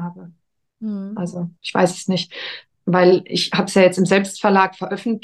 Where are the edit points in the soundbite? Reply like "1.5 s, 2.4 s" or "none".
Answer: 1.6 s